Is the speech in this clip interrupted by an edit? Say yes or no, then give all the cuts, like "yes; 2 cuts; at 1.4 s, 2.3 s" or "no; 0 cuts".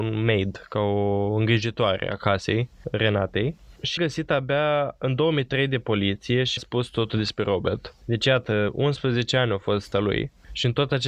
yes; 3 cuts; at 4.0 s, 6.6 s, 9.9 s